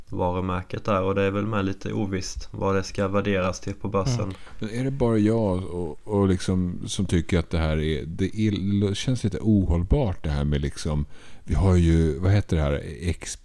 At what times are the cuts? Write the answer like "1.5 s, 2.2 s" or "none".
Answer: none

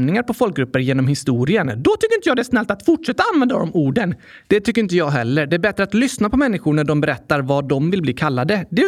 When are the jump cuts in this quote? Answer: none

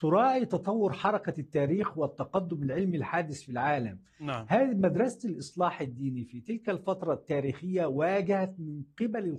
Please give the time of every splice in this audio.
none

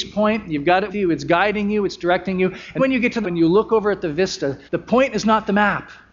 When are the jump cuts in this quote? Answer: 0.9 s, 2.8 s, 3.2 s, 4.7 s

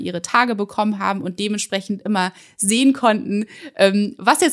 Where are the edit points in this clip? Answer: none

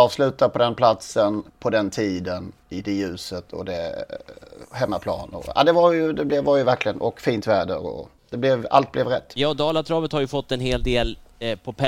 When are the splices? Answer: 1.5 s, 2.6 s

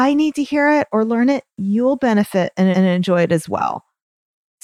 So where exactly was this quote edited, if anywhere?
1.5 s, 2.7 s

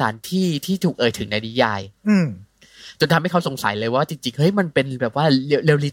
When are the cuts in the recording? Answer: 2.0 s

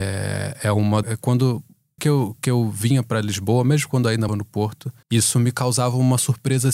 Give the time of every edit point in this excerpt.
1.0 s, 2.0 s, 4.3 s, 5.0 s

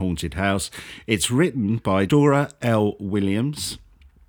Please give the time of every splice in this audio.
2.1 s

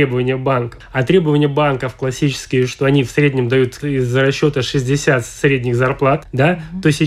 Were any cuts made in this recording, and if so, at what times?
3.8 s

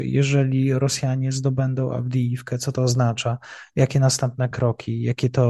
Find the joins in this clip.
none

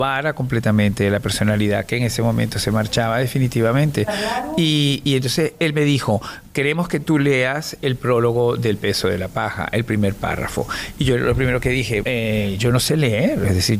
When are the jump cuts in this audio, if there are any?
12.0 s

